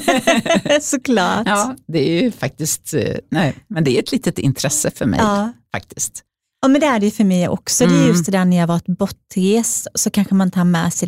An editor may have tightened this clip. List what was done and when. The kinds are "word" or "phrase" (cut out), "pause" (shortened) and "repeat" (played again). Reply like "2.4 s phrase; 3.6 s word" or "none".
none